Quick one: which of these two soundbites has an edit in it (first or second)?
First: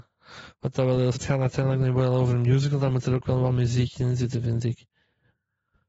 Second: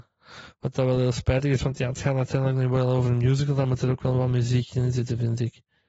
first